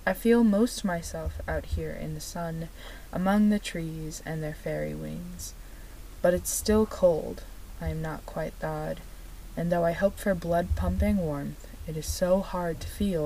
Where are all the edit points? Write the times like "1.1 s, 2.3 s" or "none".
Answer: none